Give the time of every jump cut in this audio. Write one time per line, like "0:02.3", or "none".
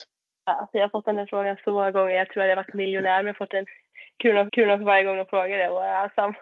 0:04.5